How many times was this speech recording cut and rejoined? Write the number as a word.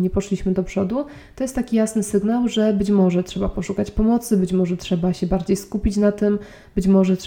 zero